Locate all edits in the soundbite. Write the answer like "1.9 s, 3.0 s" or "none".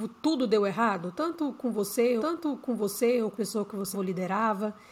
2.2 s, 3.3 s, 3.9 s